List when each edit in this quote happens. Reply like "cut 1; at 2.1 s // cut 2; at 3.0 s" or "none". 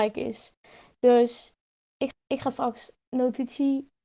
cut 1; at 2.1 s // cut 2; at 2.9 s

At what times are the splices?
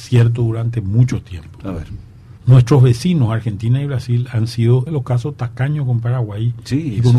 cut 1; at 2.4 s // cut 2; at 4.9 s

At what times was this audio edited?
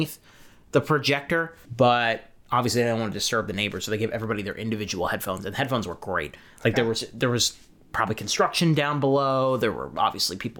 cut 1; at 1.6 s

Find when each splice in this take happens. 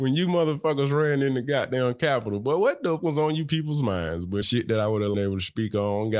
cut 1; at 3.0 s // cut 2; at 4.4 s // cut 3; at 5.1 s

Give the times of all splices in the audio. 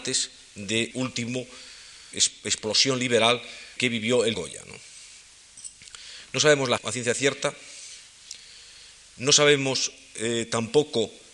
cut 1; at 0.9 s // cut 2; at 2.1 s // cut 3; at 3.8 s // cut 4; at 4.3 s // cut 5; at 6.8 s

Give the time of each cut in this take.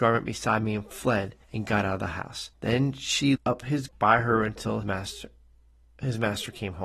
cut 1; at 1.4 s // cut 2; at 2.5 s // cut 3; at 3.4 s // cut 4; at 3.9 s // cut 5; at 4.8 s

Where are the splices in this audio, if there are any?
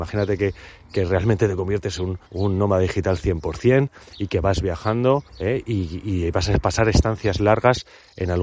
cut 1; at 2.3 s // cut 2; at 5.3 s

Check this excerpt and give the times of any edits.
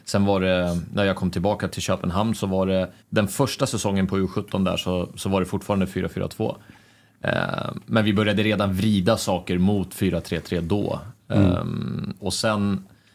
cut 1; at 1.7 s // cut 2; at 3.0 s // cut 3; at 12.2 s

